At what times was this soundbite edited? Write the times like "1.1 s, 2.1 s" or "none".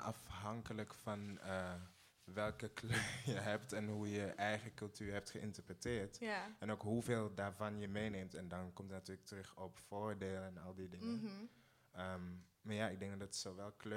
none